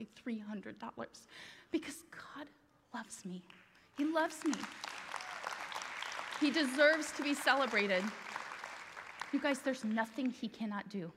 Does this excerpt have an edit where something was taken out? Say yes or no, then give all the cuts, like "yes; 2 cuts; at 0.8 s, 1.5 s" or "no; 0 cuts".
no; 0 cuts